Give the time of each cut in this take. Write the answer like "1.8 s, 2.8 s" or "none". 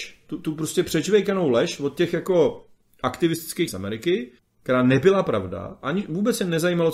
3.7 s, 4.4 s